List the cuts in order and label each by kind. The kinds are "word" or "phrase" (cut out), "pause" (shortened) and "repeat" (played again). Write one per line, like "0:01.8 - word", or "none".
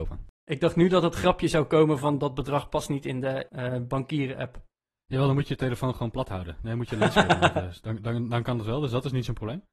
none